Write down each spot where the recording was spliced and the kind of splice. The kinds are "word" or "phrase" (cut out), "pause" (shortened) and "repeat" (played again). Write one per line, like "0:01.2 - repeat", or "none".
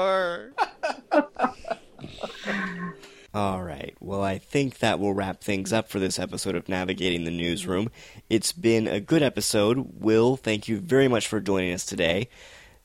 none

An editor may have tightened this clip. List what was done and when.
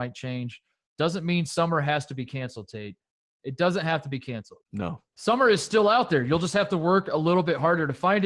none

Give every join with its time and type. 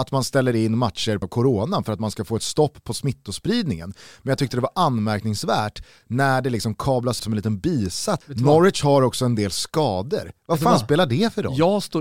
0:01.2 - word
0:07.2 - word
0:08.2 - word

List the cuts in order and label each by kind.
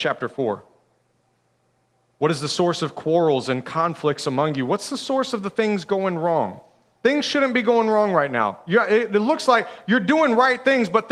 none

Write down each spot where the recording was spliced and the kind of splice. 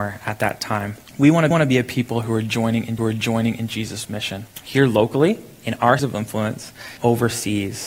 0:01.1 - pause
0:01.5 - repeat
0:03.0 - repeat
0:04.5 - pause
0:06.0 - word
0:07.0 - word

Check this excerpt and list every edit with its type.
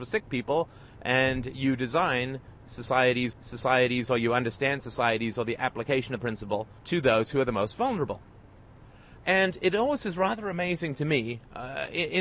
0:03.3 - repeat
0:06.2 - phrase
0:06.8 - pause

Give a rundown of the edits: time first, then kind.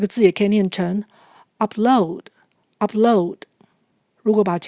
none

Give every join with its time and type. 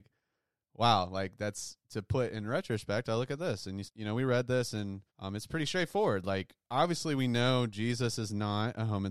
0:01.8 - pause
0:03.9 - word
0:05.1 - pause

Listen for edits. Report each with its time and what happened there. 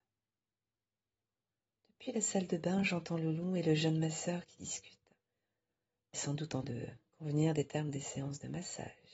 0:06.1 - phrase
0:06.6 - word

